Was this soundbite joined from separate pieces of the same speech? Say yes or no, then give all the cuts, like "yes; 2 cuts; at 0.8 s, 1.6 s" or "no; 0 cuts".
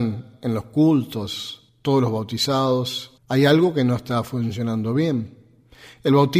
yes; 2 cuts; at 1.7 s, 3.2 s